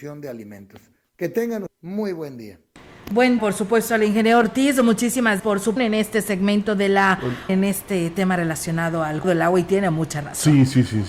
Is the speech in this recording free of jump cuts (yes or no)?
no